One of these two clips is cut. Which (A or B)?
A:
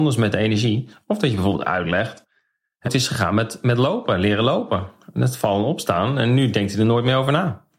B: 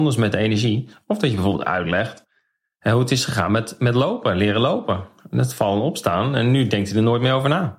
A